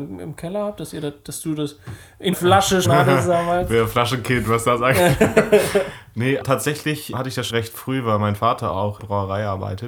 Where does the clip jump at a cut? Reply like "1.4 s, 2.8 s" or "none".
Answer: 2.3 s, 2.8 s, 6.4 s, 7.1 s, 7.5 s, 9.0 s